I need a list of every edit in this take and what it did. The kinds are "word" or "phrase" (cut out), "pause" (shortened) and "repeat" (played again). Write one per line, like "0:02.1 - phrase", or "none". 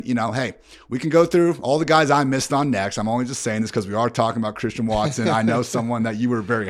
none